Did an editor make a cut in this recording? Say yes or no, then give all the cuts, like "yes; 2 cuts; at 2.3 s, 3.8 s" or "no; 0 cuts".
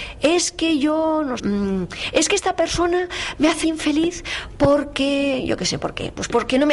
yes; 2 cuts; at 1.4 s, 3.6 s